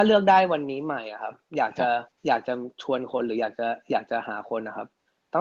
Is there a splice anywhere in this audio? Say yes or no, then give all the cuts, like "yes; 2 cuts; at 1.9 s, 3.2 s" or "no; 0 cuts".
yes; 1 cut; at 2.1 s